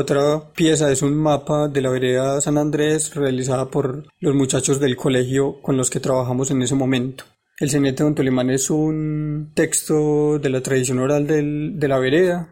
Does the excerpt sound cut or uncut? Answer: uncut